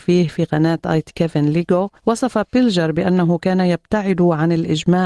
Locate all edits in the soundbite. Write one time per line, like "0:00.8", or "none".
0:01.1
0:02.0